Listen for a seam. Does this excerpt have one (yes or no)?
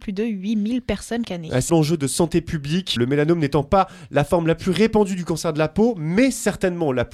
yes